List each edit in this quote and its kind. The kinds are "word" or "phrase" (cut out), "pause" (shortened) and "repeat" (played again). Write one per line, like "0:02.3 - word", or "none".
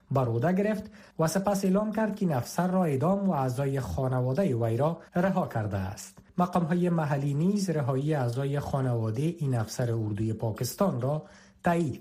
0:05.1 - pause
0:06.3 - pause